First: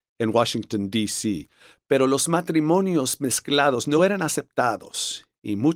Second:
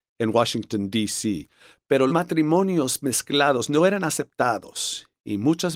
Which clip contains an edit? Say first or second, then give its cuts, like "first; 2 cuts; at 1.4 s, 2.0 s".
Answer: second; 1 cut; at 2.1 s